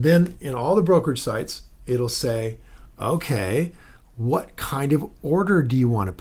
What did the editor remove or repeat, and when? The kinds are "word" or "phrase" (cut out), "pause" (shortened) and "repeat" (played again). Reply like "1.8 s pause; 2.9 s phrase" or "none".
none